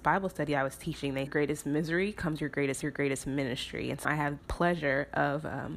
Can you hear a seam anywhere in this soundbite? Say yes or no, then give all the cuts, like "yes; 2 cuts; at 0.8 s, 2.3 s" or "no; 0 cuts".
yes; 4 cuts; at 1.3 s, 2.8 s, 4.0 s, 4.4 s